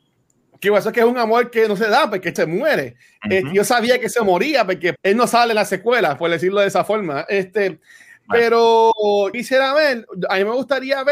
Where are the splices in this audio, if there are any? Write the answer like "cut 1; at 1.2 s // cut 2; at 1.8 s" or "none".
cut 1; at 2.4 s // cut 2; at 5.0 s // cut 3; at 9.3 s